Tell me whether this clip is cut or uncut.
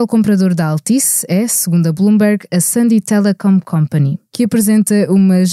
uncut